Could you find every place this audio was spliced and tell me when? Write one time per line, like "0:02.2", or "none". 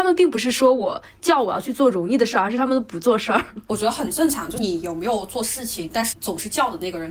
none